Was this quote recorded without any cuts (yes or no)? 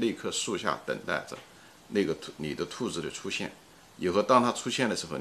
yes